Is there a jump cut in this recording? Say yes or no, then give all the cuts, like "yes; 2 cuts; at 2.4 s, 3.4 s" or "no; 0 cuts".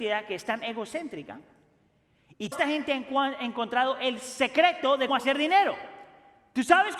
yes; 2 cuts; at 2.5 s, 5.1 s